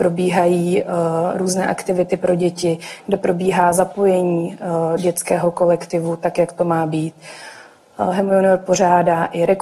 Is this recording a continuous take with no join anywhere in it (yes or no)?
no